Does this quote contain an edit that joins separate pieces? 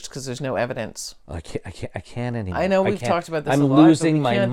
no; 0 cuts

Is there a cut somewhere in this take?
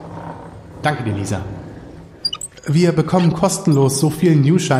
no; 0 cuts

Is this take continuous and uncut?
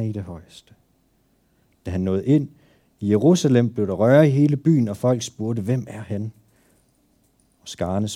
yes; 0 cuts

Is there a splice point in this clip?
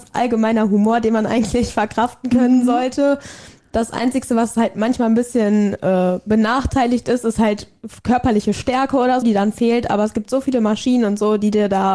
yes; 1 cut; at 9.2 s

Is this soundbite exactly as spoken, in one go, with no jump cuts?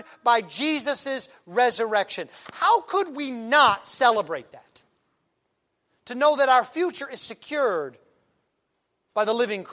yes; 0 cuts

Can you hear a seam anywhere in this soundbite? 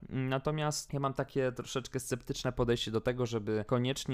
no; 0 cuts

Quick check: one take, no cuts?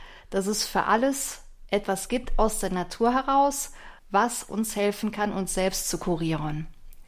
no; 1 cut; at 4.0 s

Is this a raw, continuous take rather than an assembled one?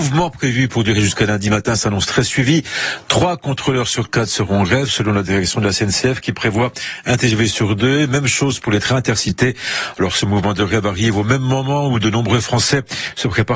yes; 0 cuts

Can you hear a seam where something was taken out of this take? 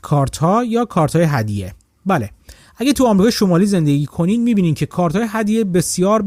no; 0 cuts

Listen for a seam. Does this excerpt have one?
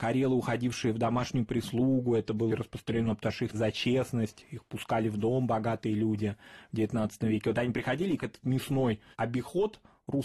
yes; 4 cuts; at 2.5 s, 3.5 s, 8.2 s, 9.1 s

